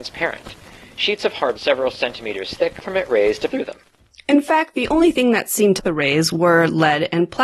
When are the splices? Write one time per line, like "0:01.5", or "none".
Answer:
0:01.5
0:02.8
0:03.5
0:05.8